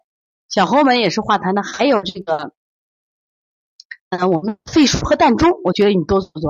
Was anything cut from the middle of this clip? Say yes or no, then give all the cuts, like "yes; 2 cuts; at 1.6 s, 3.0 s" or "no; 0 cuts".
yes; 1 cut; at 4.1 s